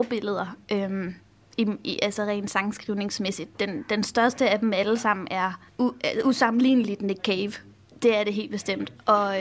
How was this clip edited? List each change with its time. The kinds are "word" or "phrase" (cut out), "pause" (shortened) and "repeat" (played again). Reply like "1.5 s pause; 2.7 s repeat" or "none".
5.7 s pause